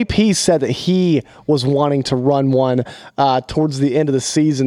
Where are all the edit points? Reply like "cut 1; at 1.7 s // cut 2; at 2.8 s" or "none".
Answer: none